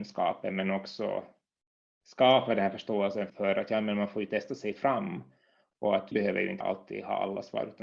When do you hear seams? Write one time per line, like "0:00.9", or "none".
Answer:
0:03.3
0:06.1
0:06.6